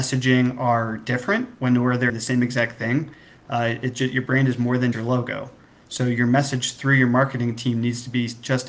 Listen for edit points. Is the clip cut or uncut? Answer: cut